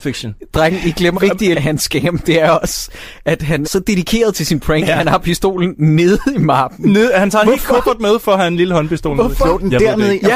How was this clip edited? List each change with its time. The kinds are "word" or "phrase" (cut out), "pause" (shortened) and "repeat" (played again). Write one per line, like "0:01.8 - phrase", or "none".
0:01.1 - word
0:01.5 - phrase
0:03.6 - word

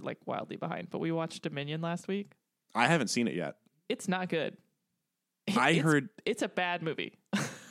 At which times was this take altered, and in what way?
none

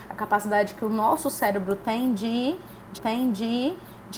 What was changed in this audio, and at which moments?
0:02.9 - repeat

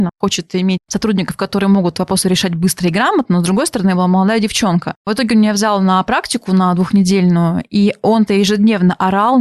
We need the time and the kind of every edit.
0:08.3 - word

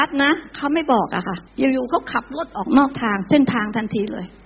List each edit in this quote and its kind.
0:01.5 - pause

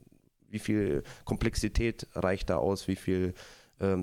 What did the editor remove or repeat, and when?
none

